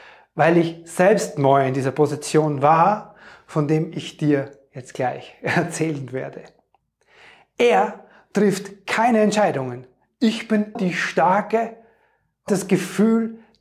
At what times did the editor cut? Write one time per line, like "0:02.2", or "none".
0:10.7
0:12.5